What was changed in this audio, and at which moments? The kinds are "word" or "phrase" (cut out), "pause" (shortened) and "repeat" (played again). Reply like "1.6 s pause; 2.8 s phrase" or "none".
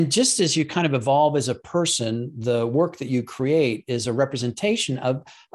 none